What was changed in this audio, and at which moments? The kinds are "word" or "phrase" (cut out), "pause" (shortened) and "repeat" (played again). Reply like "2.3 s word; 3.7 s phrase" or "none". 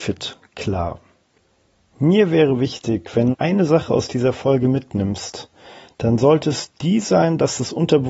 3.3 s word